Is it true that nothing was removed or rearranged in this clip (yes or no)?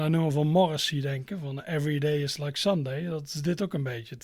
yes